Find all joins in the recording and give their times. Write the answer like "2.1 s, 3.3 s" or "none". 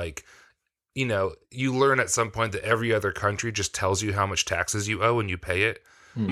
1.4 s